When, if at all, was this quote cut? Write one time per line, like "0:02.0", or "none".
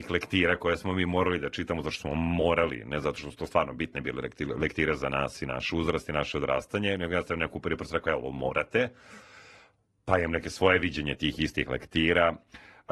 none